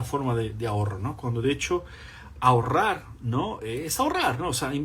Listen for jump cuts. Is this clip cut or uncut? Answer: uncut